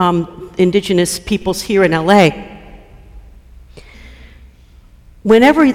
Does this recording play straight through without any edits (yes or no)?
yes